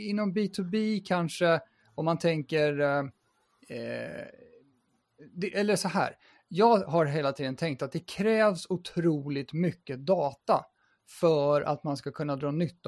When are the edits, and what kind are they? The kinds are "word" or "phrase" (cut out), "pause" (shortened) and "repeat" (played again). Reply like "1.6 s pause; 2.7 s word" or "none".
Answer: none